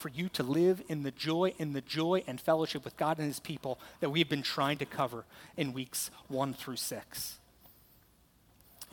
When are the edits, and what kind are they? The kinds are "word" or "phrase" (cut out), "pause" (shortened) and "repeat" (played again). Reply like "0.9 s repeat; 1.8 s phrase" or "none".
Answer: 1.5 s repeat

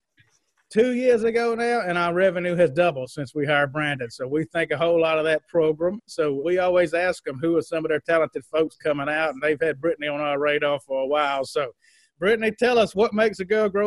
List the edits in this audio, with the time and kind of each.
none

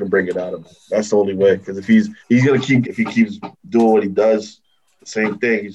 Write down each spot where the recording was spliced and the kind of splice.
2.2 s pause; 2.8 s phrase

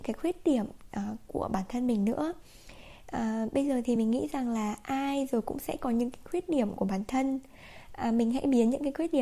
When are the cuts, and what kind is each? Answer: none

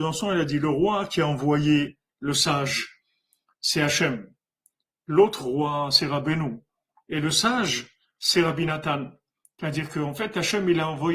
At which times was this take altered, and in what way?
none

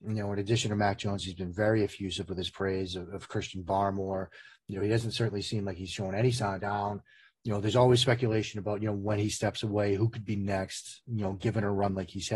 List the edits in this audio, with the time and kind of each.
6.6 s phrase

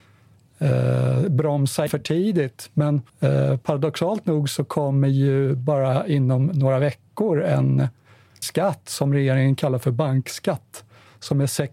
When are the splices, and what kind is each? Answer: 1.9 s word; 3.1 s pause; 8.4 s word

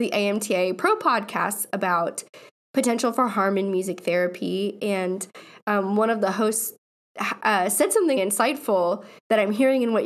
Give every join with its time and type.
8.2 s word

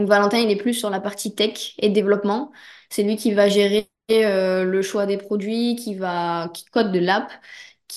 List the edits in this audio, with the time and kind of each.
none

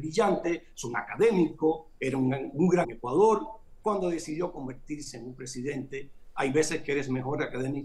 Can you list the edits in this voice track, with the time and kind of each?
2.0 s word; 2.8 s word

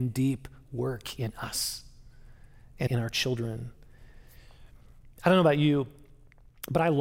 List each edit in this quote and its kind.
2.9 s word

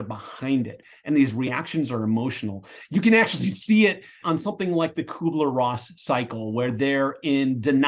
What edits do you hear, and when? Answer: 4.2 s word

